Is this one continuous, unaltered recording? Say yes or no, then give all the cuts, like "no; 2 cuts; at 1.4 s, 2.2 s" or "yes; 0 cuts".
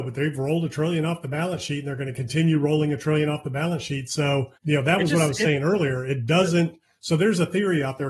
no; 1 cut; at 4.6 s